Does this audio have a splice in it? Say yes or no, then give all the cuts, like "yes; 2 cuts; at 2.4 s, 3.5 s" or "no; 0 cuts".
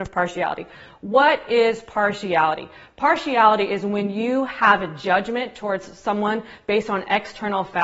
no; 0 cuts